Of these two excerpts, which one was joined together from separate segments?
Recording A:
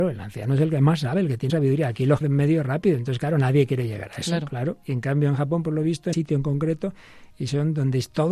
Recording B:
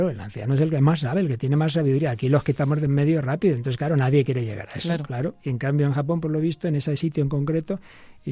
A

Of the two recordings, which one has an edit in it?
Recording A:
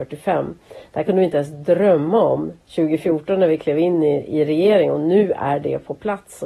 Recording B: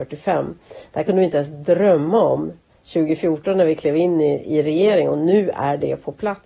A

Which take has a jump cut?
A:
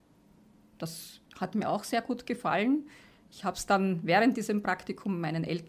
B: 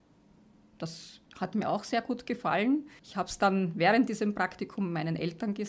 B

